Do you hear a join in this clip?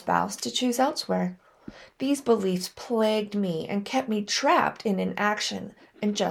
no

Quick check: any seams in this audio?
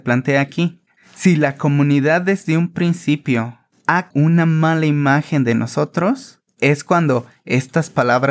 yes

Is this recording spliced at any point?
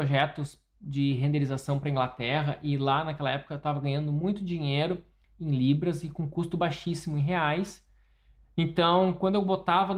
no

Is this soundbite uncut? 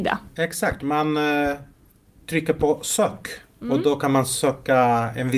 yes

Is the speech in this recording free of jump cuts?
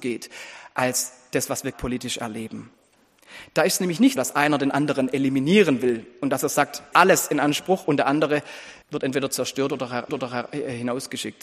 no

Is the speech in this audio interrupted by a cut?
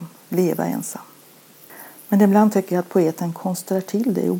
no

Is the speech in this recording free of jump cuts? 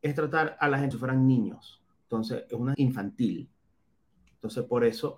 no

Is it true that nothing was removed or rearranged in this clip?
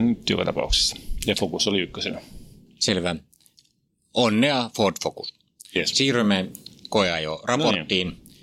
yes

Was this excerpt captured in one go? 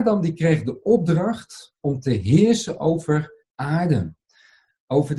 no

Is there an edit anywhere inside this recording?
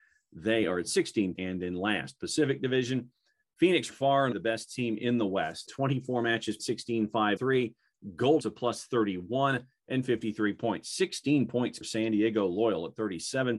yes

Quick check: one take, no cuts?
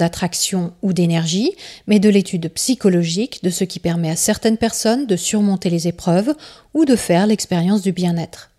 yes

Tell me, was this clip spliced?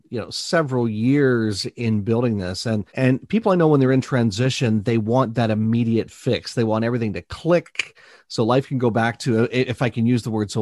yes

